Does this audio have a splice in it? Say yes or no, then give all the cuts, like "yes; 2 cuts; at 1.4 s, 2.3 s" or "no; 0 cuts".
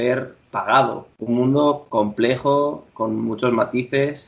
yes; 1 cut; at 1.1 s